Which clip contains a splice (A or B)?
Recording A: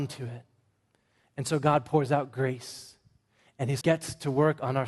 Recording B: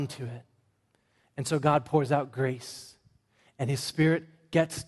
A